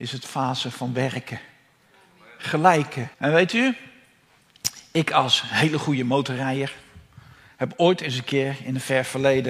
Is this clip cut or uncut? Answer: cut